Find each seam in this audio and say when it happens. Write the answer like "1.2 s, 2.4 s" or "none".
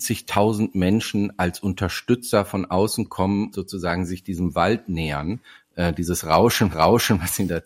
3.5 s, 6.7 s